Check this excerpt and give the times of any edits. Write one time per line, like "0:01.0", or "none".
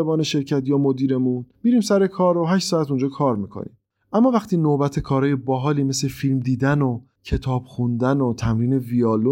0:01.5
0:04.0